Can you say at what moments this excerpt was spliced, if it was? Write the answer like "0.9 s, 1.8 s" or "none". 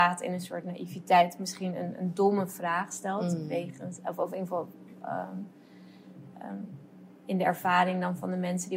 none

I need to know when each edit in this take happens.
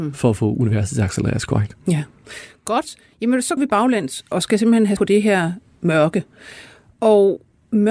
3.6 s, 4.3 s, 5.0 s

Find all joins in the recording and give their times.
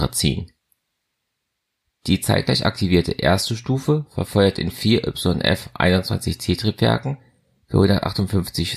none

